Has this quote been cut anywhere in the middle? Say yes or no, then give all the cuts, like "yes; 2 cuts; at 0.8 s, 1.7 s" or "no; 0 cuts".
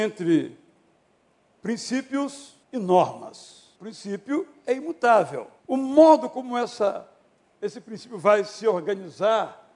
yes; 3 cuts; at 2.6 s, 3.7 s, 5.6 s